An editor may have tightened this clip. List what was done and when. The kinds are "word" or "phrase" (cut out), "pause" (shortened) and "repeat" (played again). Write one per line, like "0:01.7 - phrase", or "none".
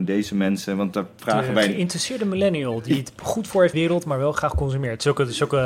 0:03.7 - phrase